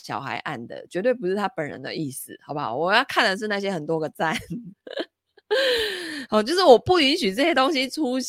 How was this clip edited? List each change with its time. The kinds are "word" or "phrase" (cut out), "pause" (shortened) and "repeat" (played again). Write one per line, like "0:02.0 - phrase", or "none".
none